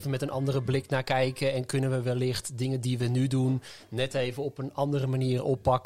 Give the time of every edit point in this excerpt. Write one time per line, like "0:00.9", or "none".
none

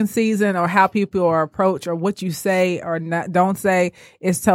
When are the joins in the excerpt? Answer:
none

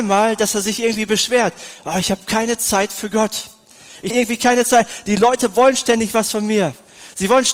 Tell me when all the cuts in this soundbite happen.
0:04.1

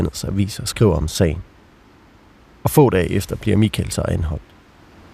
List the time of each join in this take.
none

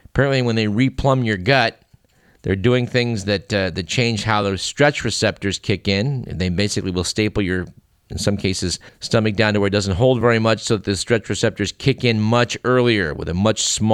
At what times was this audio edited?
none

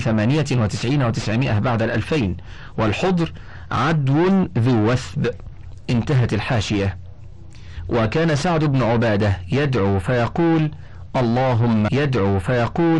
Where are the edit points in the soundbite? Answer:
0:11.9

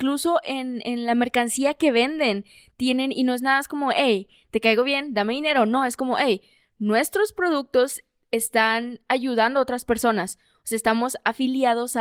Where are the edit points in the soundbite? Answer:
none

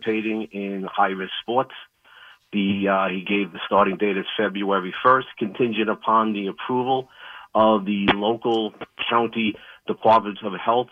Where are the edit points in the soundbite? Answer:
none

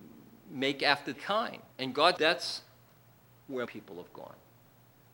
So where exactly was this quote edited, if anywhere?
0:01.1
0:01.7
0:02.2
0:03.7

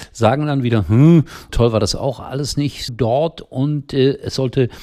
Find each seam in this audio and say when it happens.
0:01.5
0:02.9

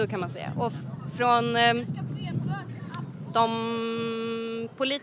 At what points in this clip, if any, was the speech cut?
none

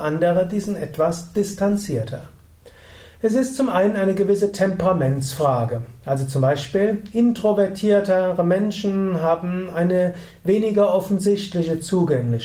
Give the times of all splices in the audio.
none

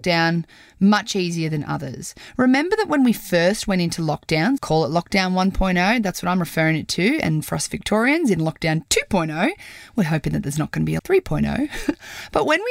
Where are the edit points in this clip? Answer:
0:04.6
0:11.0

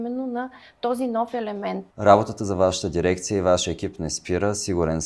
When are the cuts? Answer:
0:01.9

